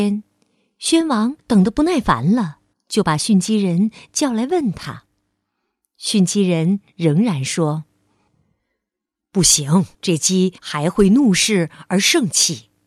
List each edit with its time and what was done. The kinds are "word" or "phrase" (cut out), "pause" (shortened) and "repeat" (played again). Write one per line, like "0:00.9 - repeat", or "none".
0:01.4 - pause
0:02.7 - pause
0:09.9 - pause
0:10.6 - pause